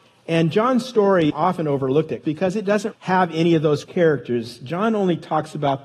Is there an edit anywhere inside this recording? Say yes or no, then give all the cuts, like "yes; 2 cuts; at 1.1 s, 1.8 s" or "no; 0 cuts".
yes; 4 cuts; at 1.3 s, 2.2 s, 2.9 s, 3.8 s